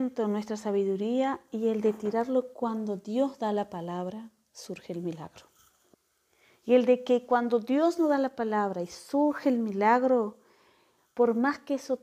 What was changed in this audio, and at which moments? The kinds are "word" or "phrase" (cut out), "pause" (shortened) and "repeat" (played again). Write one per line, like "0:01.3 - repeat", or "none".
0:05.9 - pause